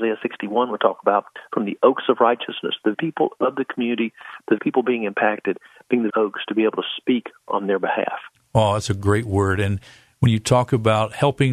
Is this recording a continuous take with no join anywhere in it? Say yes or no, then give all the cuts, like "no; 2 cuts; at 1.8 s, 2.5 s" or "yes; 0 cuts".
no; 3 cuts; at 2.9 s, 4.6 s, 6.1 s